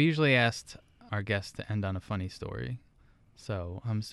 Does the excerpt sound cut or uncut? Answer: cut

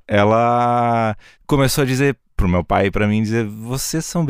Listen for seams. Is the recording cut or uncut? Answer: uncut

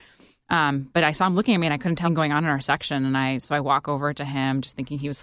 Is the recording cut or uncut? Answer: cut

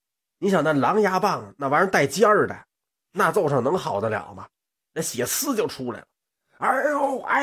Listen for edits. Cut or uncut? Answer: uncut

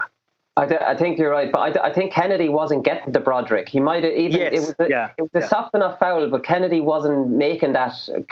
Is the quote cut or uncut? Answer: uncut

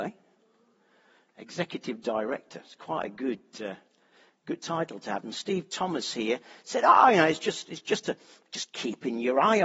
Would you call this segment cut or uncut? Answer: uncut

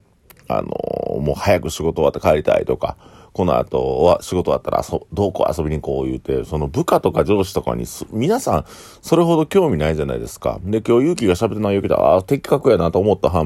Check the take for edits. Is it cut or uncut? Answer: uncut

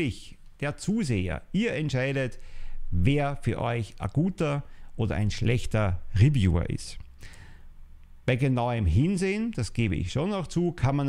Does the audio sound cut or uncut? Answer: uncut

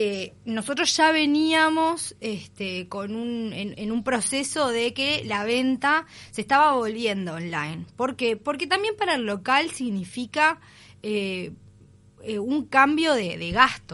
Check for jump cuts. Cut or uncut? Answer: uncut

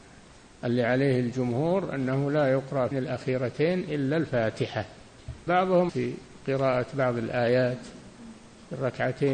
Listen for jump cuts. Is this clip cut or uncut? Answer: cut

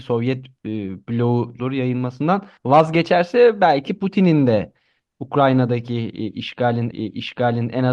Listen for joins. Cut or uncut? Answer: cut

